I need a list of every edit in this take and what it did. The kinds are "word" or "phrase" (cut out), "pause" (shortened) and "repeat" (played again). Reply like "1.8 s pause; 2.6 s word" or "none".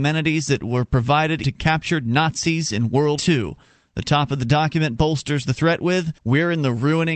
1.4 s word; 3.2 s word; 6.2 s pause